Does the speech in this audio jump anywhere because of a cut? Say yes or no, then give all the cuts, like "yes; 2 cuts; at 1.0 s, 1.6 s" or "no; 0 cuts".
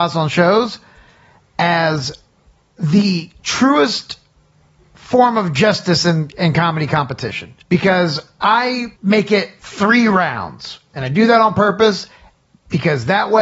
yes; 2 cuts; at 7.6 s, 9.0 s